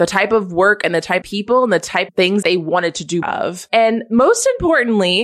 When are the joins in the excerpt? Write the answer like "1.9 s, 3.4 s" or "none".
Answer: 1.2 s, 2.1 s, 2.4 s, 3.2 s